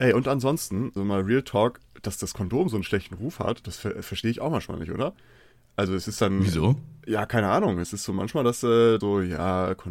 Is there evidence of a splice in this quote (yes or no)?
yes